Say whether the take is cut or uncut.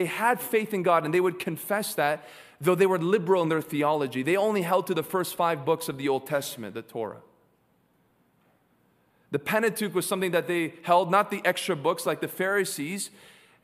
uncut